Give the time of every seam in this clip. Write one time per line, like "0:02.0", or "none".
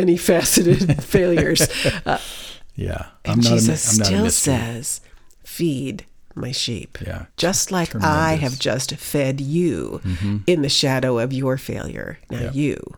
0:07.3